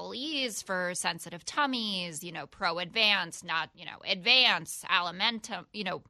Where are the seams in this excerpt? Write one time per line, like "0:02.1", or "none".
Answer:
0:03.7